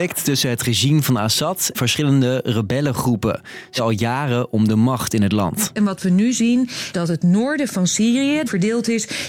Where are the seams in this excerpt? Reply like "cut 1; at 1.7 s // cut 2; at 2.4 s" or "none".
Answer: cut 1; at 1.7 s // cut 2; at 3.8 s // cut 3; at 6.9 s